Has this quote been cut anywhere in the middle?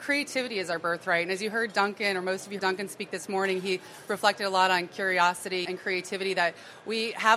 yes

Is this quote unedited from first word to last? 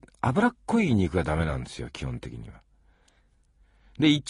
yes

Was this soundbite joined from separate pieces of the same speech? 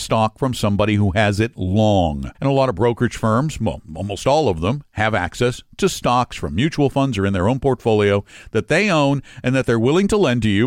yes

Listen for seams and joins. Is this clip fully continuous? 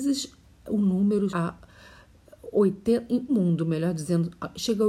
no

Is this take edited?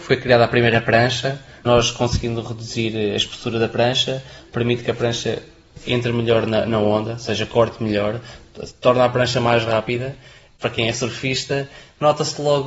no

